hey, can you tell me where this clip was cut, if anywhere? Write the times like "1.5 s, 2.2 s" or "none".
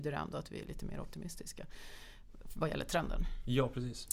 none